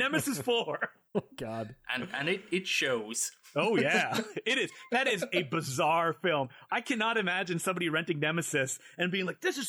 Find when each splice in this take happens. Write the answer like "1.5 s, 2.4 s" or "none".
1.1 s